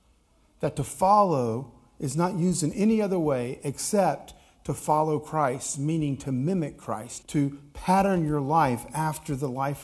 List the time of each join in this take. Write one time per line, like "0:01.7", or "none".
0:07.2